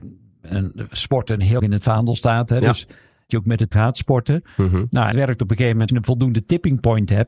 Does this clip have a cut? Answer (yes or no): yes